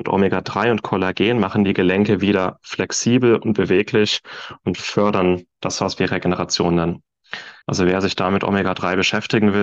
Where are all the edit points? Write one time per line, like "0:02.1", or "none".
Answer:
0:07.6